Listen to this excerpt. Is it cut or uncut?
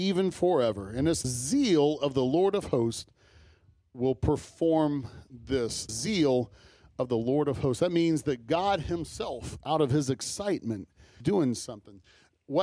cut